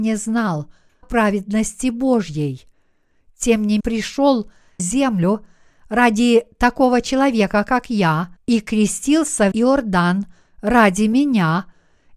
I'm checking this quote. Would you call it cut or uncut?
cut